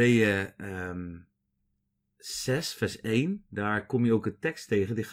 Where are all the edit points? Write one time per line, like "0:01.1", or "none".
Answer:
0:01.6